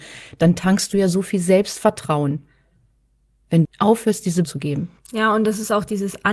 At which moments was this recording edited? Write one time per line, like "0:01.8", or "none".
0:03.6
0:04.4
0:05.0